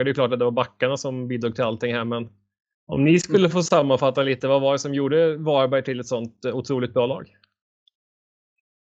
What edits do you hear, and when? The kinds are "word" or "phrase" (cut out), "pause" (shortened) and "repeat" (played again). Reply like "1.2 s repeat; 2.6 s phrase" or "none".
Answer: none

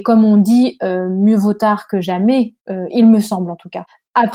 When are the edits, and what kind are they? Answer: 2.6 s pause

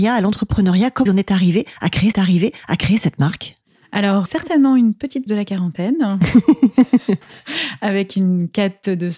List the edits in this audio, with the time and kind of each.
1.1 s word; 2.1 s repeat; 4.3 s word; 5.3 s word

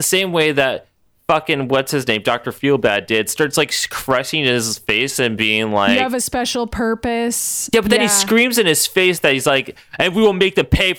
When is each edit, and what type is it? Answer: none

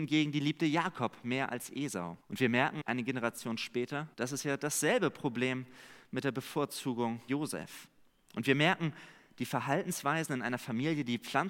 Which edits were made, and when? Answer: 2.2 s pause; 2.8 s word; 4.1 s pause; 7.3 s word

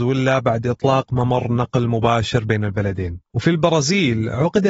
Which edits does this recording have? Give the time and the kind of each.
3.3 s pause

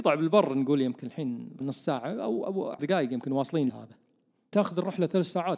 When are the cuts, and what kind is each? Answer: 1.6 s word; 2.8 s word; 3.7 s word; 4.5 s word

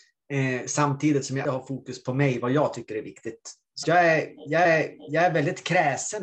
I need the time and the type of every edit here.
1.4 s word; 3.8 s word; 4.6 s repeat

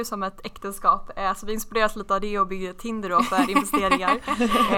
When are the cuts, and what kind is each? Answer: none

